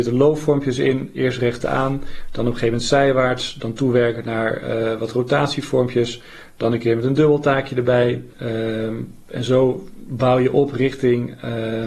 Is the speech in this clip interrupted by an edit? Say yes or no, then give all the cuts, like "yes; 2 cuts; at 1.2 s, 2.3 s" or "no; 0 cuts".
yes; 2 cuts; at 1.6 s, 8.3 s